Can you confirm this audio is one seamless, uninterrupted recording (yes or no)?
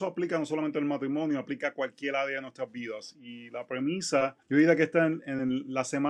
no